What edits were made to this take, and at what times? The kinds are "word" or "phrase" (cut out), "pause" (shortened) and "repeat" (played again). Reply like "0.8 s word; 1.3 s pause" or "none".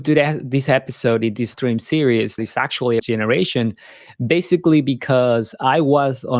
1.5 s word; 2.4 s word; 3.0 s phrase